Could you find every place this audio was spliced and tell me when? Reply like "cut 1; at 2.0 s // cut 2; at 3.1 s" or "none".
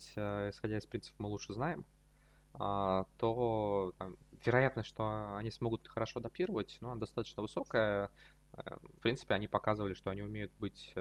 cut 1; at 9.0 s